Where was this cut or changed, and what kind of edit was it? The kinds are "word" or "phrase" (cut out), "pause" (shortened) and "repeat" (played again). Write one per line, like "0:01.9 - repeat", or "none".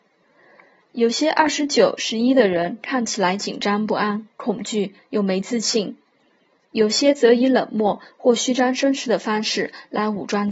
0:04.3 - pause